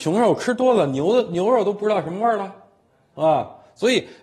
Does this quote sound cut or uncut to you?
uncut